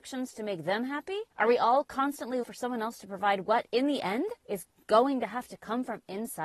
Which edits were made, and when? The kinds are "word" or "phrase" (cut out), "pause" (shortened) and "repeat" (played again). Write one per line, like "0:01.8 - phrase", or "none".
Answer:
0:01.3 - pause
0:02.4 - word
0:04.4 - pause